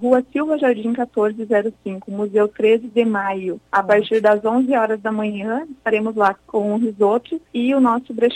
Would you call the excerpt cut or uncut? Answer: cut